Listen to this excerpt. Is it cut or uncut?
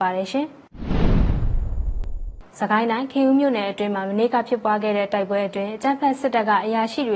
cut